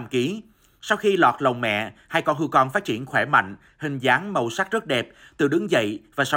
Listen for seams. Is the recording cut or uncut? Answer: uncut